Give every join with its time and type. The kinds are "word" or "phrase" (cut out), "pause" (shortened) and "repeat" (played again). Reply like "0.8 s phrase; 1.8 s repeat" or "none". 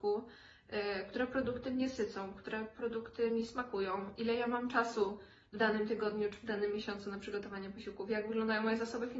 none